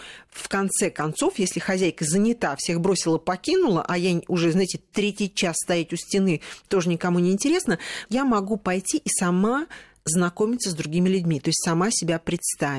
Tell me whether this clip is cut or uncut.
uncut